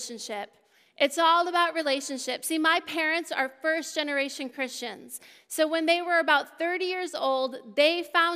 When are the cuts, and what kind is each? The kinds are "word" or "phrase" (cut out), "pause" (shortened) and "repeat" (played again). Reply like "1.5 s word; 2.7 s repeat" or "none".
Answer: none